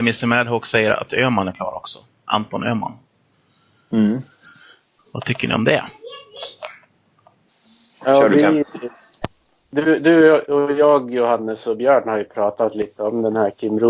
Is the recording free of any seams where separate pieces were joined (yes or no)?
yes